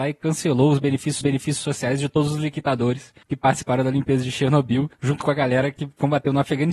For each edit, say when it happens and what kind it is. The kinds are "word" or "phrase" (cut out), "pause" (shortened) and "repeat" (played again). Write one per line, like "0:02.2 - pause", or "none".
0:01.2 - repeat
0:03.2 - pause
0:04.9 - pause